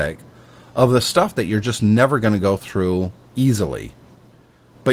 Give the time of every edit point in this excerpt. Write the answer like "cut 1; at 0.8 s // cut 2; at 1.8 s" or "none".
none